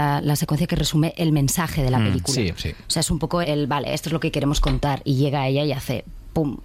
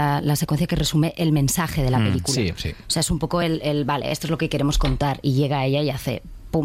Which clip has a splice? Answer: first; 1 cut; at 3.4 s

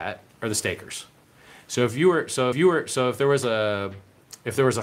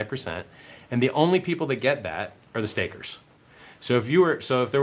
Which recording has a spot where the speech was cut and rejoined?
first; 1 cut; at 2.5 s

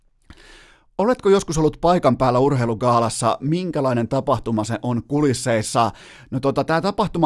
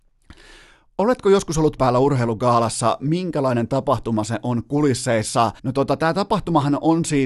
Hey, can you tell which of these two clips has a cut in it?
second; 2 cuts; at 1.8 s, 5.6 s

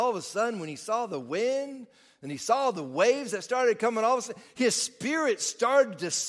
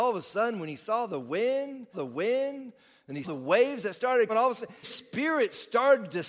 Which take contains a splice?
second; 4 cuts; at 1.9 s, 3.2 s, 4.3 s, 4.8 s

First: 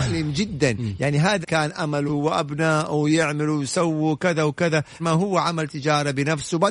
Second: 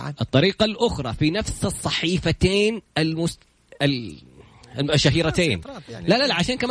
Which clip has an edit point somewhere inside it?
first; 3 cuts; at 1.4 s, 2.1 s, 5.0 s

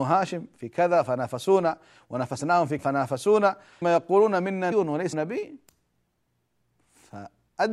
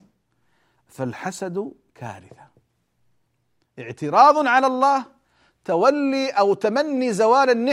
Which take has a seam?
first; 4 cuts; at 2.8 s, 3.8 s, 4.7 s, 5.1 s

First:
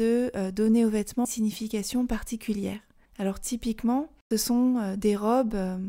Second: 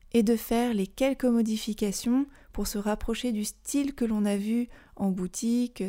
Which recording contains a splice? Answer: first; 3 cuts; at 1.2 s, 3.1 s, 4.3 s

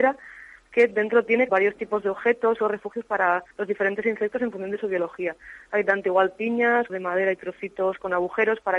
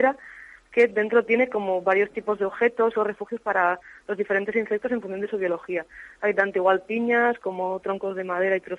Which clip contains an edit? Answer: first; 3 cuts; at 1.5 s, 3.5 s, 6.9 s

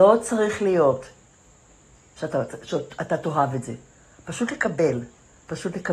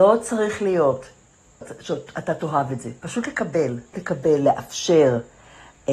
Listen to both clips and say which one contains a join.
second; 3 cuts; at 1.6 s, 3.0 s, 3.9 s

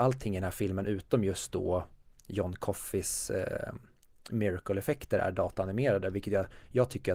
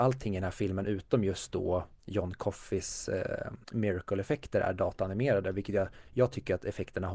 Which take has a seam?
second; 2 cuts; at 2.0 s, 3.6 s

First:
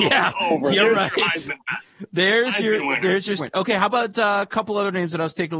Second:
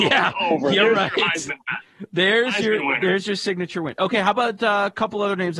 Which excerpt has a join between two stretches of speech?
first; 1 cut; at 3.4 s

